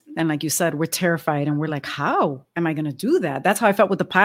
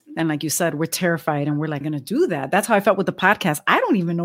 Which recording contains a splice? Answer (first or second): second